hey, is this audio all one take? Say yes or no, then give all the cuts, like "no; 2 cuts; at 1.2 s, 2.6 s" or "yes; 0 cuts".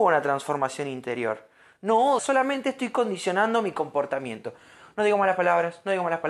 no; 1 cut; at 2.2 s